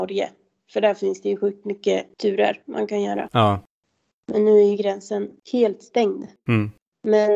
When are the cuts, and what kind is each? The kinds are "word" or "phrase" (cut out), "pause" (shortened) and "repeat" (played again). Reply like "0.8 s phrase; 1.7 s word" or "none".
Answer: none